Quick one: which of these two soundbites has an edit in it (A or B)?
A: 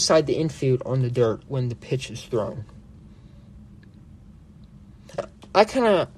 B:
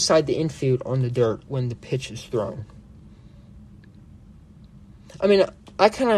A